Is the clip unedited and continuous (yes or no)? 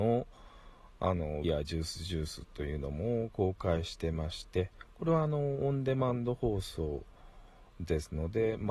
no